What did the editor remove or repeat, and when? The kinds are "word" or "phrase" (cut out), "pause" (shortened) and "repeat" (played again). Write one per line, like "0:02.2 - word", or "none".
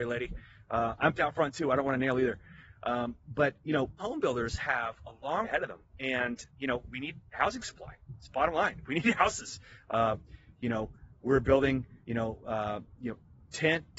0:01.2 - word
0:04.0 - word
0:05.4 - word
0:06.5 - word
0:12.0 - pause